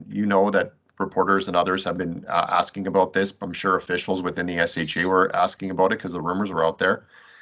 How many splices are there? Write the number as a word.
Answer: zero